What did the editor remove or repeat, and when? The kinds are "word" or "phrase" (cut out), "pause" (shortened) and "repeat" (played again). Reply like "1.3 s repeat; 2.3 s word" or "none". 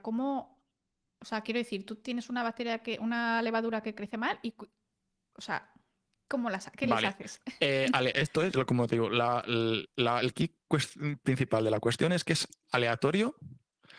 none